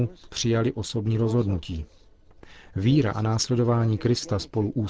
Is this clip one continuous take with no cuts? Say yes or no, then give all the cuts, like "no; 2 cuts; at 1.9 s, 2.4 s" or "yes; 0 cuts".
yes; 0 cuts